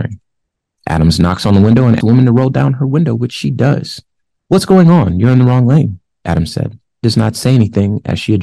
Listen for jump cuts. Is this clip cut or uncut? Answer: cut